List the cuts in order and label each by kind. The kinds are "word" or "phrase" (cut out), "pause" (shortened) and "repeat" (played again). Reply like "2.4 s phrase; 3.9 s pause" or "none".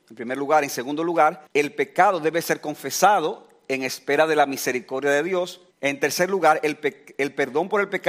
1.5 s pause; 5.7 s pause